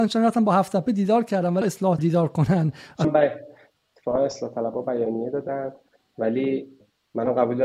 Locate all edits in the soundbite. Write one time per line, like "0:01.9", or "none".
0:01.6
0:02.0
0:03.0